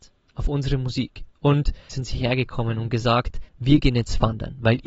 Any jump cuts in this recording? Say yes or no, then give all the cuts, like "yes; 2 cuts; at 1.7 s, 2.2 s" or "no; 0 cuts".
yes; 2 cuts; at 1.9 s, 3.5 s